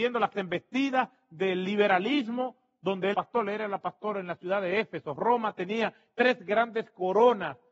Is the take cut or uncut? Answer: cut